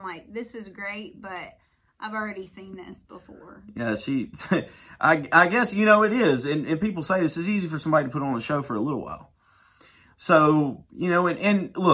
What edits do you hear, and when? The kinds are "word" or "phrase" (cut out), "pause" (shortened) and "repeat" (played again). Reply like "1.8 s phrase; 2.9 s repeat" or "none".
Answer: none